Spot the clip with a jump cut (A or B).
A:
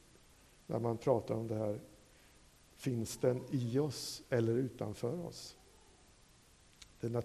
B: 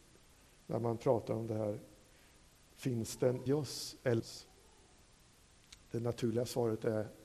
B